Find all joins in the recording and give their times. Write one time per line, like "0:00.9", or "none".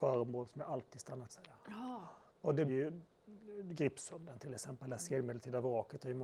0:01.3
0:02.3
0:02.7